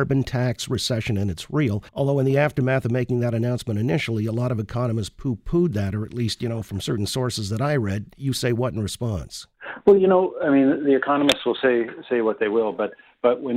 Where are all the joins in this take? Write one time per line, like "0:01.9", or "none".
0:01.9